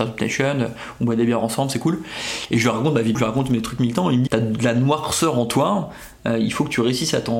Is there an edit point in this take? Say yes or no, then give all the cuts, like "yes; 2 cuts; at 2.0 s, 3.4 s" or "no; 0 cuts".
yes; 2 cuts; at 3.1 s, 4.3 s